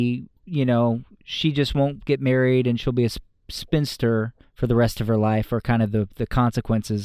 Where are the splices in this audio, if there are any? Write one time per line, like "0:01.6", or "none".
none